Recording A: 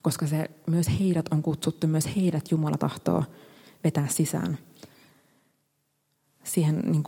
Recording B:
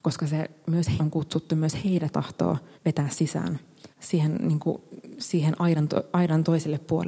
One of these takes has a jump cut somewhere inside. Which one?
B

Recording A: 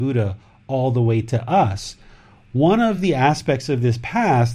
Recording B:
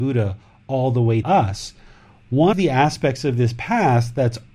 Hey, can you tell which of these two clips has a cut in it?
B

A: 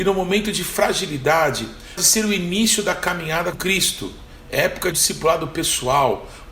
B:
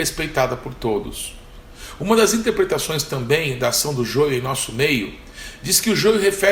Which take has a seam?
A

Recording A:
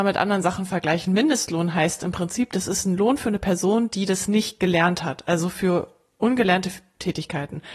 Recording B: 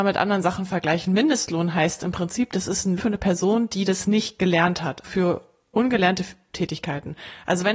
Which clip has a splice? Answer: B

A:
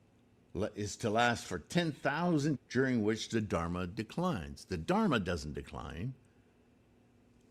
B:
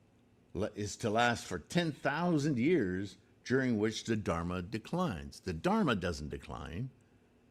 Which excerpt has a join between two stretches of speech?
A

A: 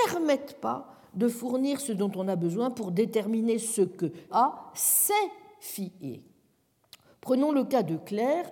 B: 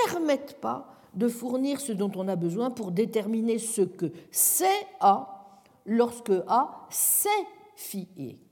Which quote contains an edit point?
A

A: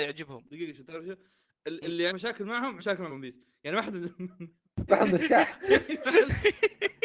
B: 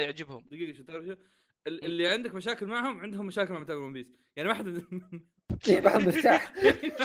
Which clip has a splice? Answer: A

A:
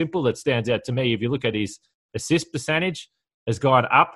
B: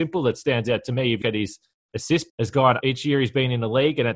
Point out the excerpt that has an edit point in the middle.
B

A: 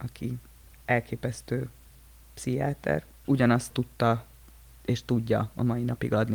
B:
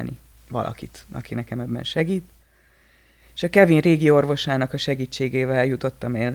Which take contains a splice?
A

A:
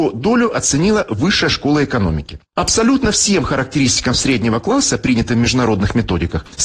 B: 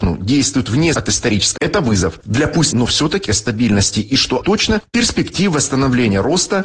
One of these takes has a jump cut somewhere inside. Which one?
B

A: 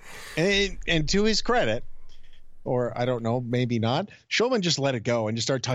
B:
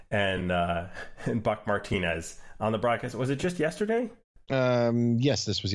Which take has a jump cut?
B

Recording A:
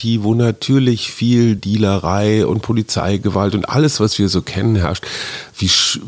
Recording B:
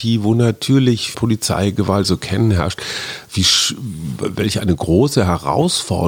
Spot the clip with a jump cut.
B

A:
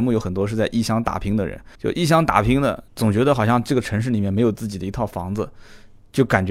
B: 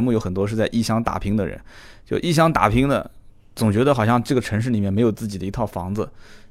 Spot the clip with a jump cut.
A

